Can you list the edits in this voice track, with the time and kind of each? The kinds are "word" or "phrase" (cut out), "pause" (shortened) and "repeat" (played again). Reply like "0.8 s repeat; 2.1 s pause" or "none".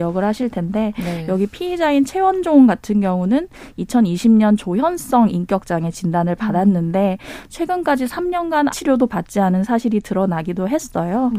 8.7 s word